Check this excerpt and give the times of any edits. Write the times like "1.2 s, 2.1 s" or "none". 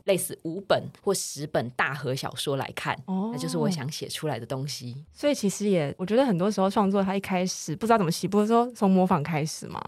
1.0 s